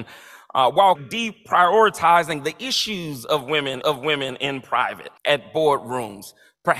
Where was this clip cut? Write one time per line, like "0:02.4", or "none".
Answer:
0:01.0
0:03.8
0:05.2